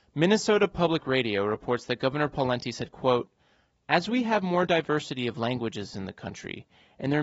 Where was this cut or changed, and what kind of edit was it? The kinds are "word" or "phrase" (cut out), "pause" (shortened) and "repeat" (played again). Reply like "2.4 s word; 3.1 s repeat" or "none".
none